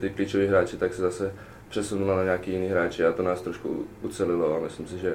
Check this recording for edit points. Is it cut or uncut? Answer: uncut